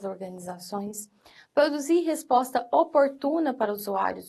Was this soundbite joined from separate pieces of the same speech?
no; 0 cuts

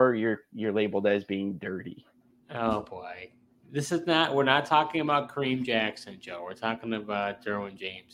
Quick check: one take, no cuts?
yes; 0 cuts

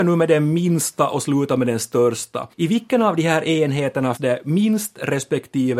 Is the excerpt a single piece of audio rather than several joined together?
no; 2 cuts; at 2.5 s, 4.2 s

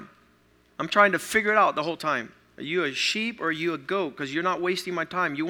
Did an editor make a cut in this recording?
no; 0 cuts

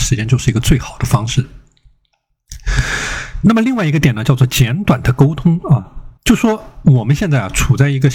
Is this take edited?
yes; 1 cut; at 6.2 s

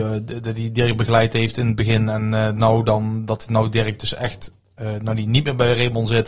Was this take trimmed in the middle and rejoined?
no; 0 cuts

